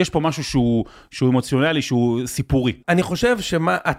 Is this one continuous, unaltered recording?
no; 1 cut; at 2.8 s

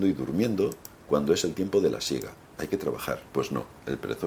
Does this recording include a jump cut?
yes; 2 cuts; at 0.9 s, 3.3 s

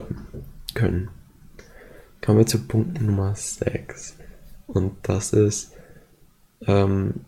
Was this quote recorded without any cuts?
yes; 0 cuts

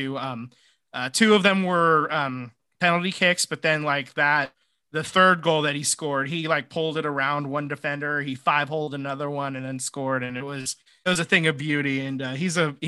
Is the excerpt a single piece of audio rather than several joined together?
yes; 0 cuts

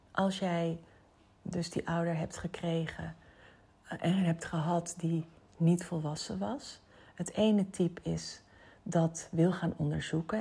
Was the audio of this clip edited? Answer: no; 0 cuts

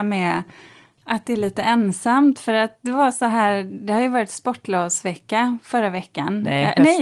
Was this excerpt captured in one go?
yes; 0 cuts

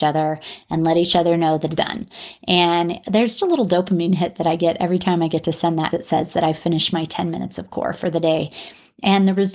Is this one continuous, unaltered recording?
no; 3 cuts; at 1.8 s, 3.4 s, 5.9 s

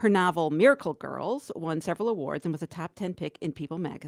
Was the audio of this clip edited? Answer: no; 0 cuts

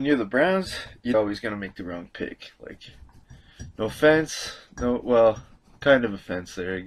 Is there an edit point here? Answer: yes; 1 cut; at 1.1 s

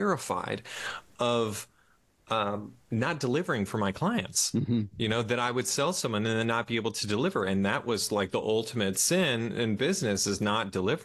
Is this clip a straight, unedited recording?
yes; 0 cuts

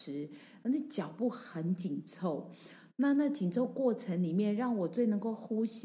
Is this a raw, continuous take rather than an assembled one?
yes; 0 cuts

